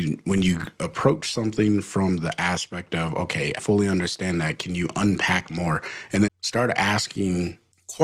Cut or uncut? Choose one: cut